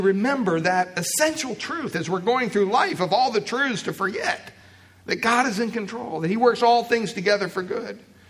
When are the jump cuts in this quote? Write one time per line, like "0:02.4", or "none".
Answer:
none